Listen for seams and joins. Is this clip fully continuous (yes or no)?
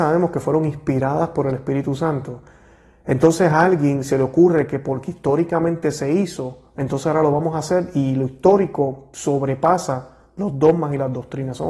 yes